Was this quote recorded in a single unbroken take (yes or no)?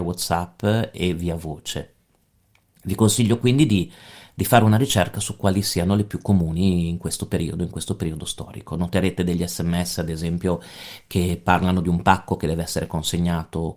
yes